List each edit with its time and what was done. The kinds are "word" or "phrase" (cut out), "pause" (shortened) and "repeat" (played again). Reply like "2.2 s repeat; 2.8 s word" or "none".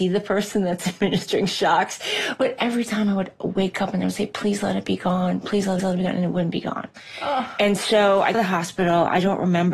5.8 s repeat; 8.3 s phrase